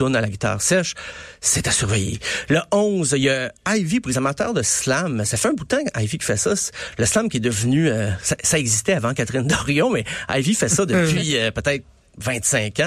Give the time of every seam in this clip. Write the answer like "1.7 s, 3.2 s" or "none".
none

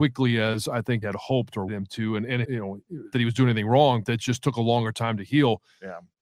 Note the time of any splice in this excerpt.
1.0 s, 1.7 s, 2.4 s, 3.1 s, 4.0 s

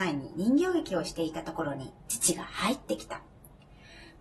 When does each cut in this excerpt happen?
2.0 s

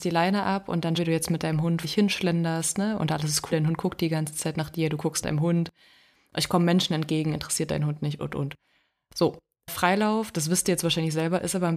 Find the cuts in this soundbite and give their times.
1.0 s, 1.8 s, 3.5 s, 5.2 s, 8.2 s

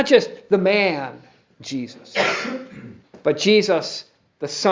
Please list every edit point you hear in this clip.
3.0 s

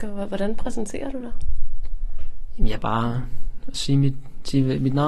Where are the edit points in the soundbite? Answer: 2.8 s

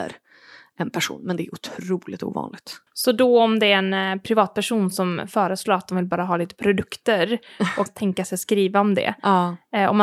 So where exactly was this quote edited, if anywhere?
2.9 s, 7.9 s

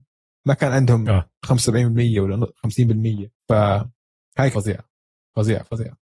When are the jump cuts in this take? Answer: 3.4 s, 4.5 s

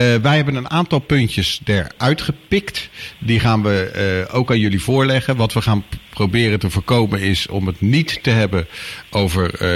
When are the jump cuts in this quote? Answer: none

